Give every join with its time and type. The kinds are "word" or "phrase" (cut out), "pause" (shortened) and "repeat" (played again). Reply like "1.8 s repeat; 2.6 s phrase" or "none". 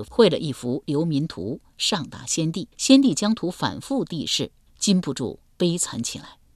2.7 s pause; 4.7 s pause